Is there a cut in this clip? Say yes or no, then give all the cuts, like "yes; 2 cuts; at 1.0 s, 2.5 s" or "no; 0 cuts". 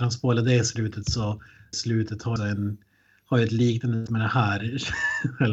yes; 3 cuts; at 1.7 s, 2.4 s, 4.1 s